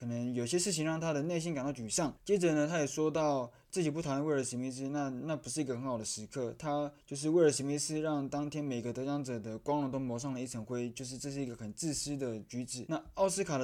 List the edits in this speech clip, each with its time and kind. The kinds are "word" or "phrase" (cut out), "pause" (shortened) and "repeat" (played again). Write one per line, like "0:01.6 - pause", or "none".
0:07.0 - pause